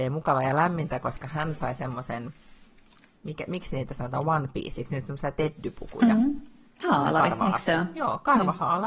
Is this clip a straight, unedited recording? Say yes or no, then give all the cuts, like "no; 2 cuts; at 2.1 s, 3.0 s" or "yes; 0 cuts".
yes; 0 cuts